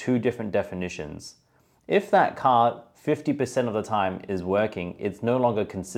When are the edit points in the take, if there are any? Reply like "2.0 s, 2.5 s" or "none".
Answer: none